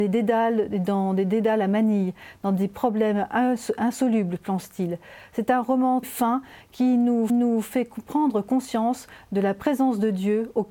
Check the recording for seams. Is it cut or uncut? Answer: cut